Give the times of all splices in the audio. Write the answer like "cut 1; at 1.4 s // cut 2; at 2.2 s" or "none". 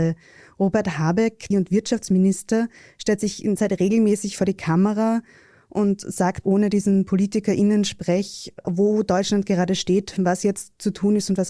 cut 1; at 1.5 s // cut 2; at 3.6 s // cut 3; at 6.4 s